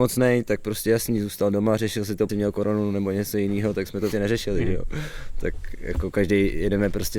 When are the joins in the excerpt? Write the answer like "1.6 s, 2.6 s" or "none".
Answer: 2.3 s, 4.1 s